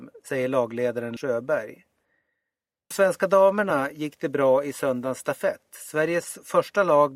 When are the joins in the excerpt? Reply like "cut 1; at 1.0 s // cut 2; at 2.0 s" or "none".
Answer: cut 1; at 1.2 s // cut 2; at 2.9 s